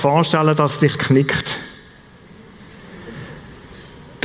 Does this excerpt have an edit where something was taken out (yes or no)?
yes